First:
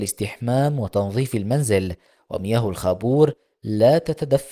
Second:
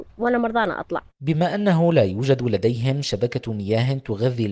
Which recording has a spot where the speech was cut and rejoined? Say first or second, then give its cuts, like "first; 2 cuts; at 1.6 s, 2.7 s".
second; 1 cut; at 1.1 s